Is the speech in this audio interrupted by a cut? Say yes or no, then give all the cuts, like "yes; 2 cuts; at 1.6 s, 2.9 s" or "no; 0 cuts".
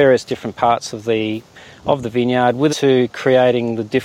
yes; 1 cut; at 2.7 s